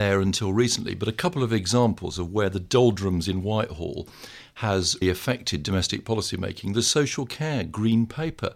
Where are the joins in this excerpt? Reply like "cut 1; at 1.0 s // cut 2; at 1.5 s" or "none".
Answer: cut 1; at 5.0 s